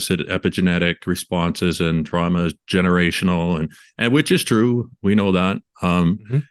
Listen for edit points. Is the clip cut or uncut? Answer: uncut